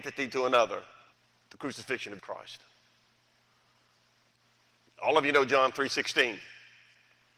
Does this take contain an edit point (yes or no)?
yes